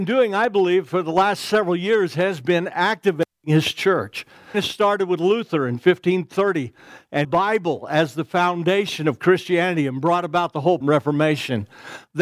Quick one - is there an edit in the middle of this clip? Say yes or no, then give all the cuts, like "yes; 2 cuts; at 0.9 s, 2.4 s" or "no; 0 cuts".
yes; 3 cuts; at 4.5 s, 7.2 s, 10.8 s